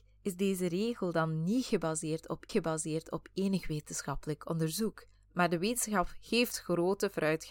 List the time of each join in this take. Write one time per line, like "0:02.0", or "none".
0:02.5
0:05.1